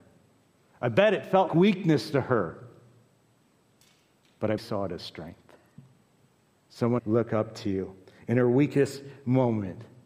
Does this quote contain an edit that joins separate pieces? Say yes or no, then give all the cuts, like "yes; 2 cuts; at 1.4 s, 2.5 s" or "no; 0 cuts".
yes; 3 cuts; at 1.5 s, 4.6 s, 7.0 s